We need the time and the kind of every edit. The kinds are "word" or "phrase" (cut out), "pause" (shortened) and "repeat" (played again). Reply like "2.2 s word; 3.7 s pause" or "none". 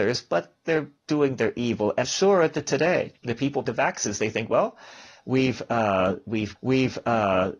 1.0 s pause; 2.0 s word; 3.2 s pause; 3.7 s word; 6.6 s repeat